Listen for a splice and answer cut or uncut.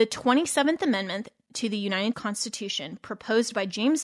cut